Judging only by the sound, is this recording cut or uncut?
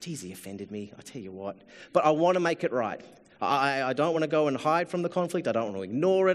uncut